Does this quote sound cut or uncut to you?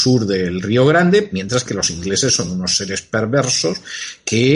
uncut